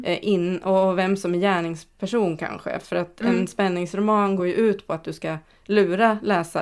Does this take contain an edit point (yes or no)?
no